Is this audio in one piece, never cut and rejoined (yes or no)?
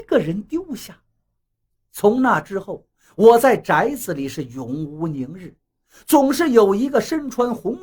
yes